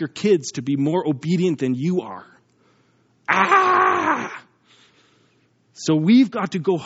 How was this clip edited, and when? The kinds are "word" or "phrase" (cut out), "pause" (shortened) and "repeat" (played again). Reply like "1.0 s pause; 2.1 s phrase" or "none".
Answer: none